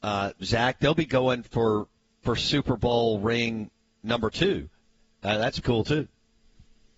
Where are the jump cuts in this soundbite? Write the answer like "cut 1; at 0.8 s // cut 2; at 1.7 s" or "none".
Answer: cut 1; at 5.6 s